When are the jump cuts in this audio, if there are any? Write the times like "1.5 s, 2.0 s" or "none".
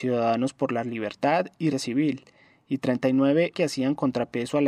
1.7 s, 3.5 s

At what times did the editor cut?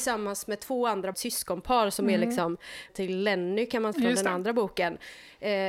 1.1 s, 2.9 s, 3.9 s

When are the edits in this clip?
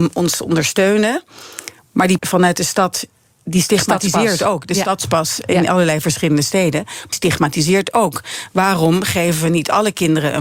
2.2 s, 7.1 s

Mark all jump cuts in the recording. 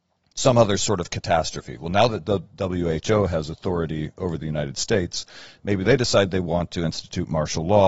none

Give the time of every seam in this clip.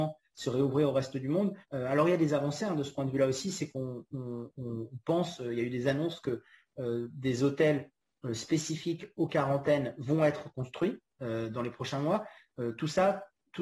1.6 s

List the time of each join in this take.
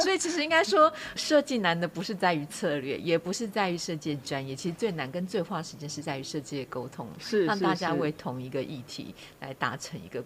1.2 s

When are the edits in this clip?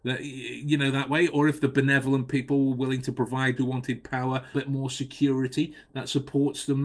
3.6 s, 4.5 s

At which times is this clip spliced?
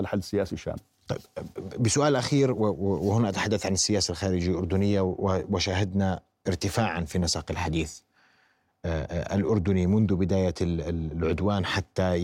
none

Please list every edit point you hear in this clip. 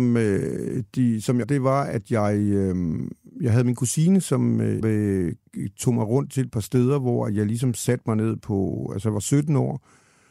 1.4 s, 4.8 s

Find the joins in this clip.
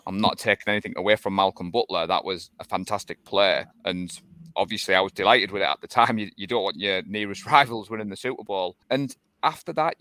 3.7 s, 8.8 s

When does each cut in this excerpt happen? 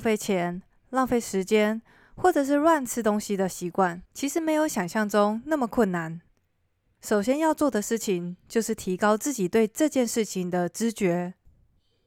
4.1 s

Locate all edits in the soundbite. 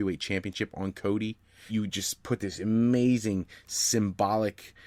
1.7 s

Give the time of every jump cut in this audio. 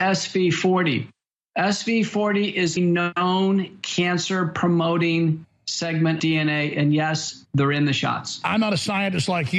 2.8 s, 6.2 s

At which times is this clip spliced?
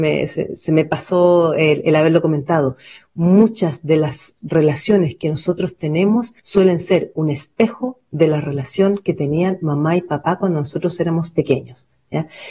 6.4 s

